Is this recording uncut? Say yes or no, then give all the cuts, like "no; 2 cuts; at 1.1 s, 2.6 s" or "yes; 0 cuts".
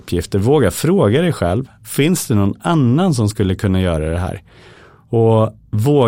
yes; 0 cuts